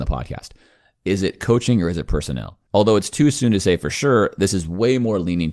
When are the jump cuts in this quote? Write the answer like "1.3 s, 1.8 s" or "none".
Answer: 2.7 s